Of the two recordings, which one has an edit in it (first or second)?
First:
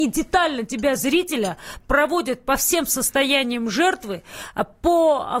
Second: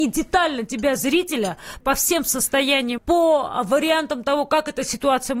second